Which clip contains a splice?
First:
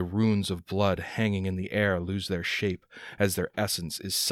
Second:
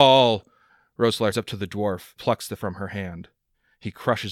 second; 3 cuts; at 1.3 s, 2.2 s, 2.6 s

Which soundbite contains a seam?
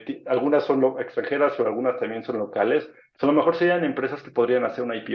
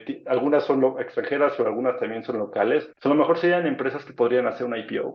second; 1 cut; at 2.9 s

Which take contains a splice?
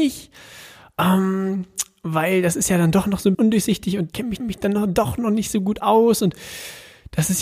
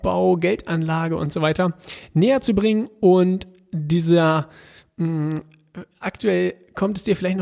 first; 3 cuts; at 3.3 s, 4.1 s, 4.4 s

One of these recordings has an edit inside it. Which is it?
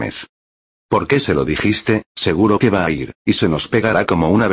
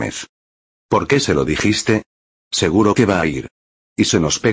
first; 2 cuts; at 2.1 s, 3.2 s

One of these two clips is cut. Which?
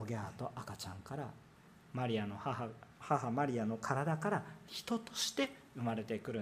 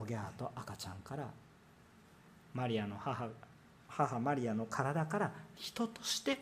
first; 2 cuts; at 1.5 s, 2.9 s

